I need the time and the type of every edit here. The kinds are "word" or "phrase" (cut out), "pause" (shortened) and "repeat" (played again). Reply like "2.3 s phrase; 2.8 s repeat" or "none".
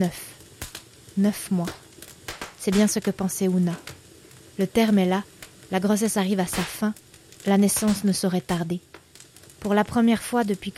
none